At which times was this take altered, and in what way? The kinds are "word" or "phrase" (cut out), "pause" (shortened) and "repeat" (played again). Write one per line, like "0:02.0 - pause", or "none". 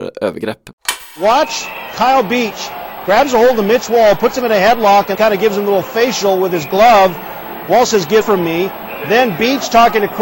0:05.1 - word
0:08.2 - word